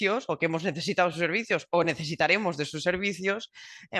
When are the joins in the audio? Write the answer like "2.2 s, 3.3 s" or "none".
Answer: none